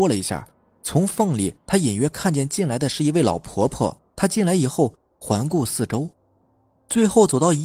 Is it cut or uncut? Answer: cut